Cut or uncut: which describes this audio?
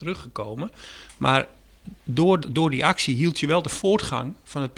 cut